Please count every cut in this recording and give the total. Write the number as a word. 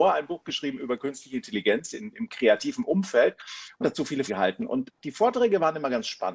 four